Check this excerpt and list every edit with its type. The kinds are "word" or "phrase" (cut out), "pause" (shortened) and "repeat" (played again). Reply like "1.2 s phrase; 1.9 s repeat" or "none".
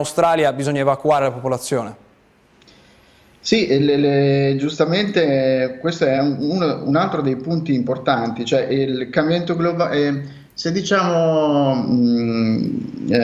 none